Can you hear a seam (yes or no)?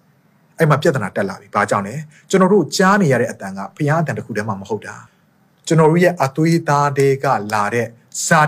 yes